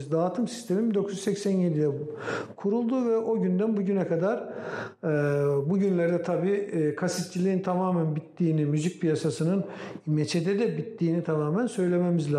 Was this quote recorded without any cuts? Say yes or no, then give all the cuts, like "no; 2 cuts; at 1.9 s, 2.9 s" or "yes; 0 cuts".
yes; 0 cuts